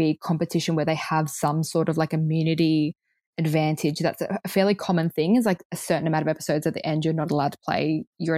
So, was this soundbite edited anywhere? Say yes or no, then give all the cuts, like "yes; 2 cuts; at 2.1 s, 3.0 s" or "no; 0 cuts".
no; 0 cuts